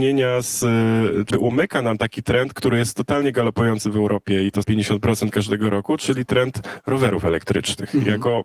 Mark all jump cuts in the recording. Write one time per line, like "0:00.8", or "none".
0:01.3
0:04.6